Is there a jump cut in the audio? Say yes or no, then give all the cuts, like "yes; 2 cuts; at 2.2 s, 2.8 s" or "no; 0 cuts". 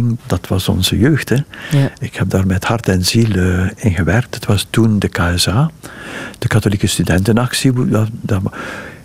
no; 0 cuts